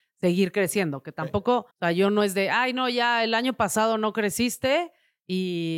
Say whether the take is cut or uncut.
cut